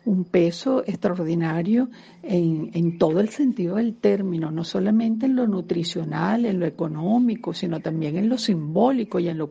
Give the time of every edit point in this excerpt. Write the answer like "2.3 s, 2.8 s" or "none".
none